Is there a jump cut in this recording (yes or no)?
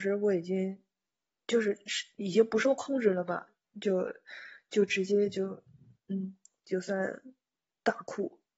no